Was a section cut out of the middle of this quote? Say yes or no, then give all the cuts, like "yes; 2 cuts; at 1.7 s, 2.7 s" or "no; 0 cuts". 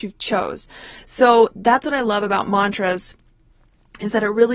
no; 0 cuts